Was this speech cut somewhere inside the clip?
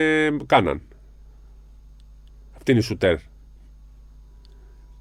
no; 0 cuts

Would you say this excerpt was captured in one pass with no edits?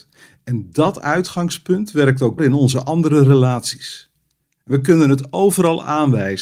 no; 1 cut; at 2.4 s

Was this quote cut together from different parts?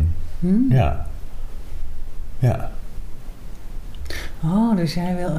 no; 0 cuts

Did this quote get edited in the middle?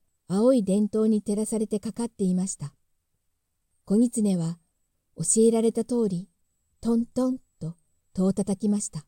no; 0 cuts

